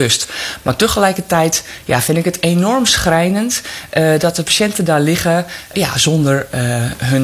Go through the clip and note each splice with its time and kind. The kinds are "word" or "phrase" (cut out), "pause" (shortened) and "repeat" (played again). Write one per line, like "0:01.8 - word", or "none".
0:05.7 - word